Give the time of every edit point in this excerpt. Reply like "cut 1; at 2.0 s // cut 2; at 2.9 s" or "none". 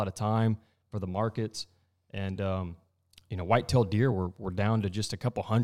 none